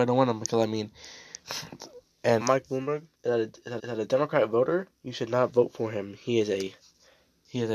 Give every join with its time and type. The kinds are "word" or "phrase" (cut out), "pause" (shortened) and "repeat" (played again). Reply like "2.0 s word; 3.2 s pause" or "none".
2.4 s phrase; 3.1 s pause; 3.8 s repeat